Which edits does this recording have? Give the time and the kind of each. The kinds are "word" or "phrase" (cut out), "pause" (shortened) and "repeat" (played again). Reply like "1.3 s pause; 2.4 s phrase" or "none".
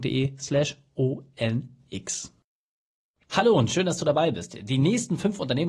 none